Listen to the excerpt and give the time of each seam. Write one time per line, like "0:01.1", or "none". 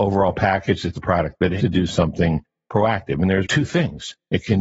0:00.9
0:01.6
0:03.4